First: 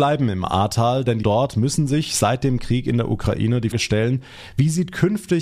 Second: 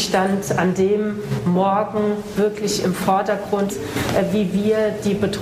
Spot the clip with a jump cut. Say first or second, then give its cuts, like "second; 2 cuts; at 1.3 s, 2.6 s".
first; 2 cuts; at 1.2 s, 3.7 s